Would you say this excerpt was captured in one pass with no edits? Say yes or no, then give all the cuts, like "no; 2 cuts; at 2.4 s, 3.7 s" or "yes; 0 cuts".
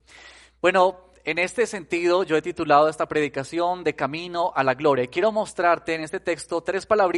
yes; 0 cuts